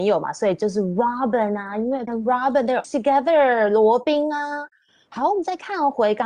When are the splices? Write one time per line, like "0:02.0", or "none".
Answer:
0:02.1
0:02.8